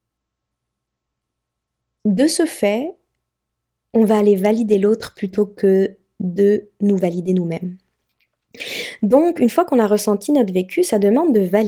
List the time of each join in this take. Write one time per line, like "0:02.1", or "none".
none